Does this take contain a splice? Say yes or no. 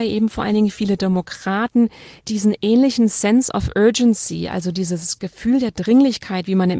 yes